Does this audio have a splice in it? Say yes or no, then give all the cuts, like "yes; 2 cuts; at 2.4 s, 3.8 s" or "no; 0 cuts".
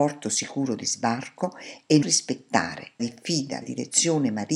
yes; 3 cuts; at 2.0 s, 3.0 s, 3.6 s